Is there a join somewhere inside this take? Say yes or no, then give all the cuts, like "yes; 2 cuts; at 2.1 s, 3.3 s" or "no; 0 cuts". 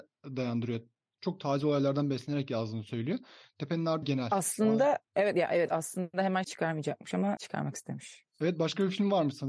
yes; 2 cuts; at 4.0 s, 7.4 s